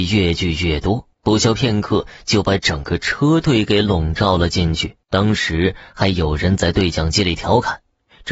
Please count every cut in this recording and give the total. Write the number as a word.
two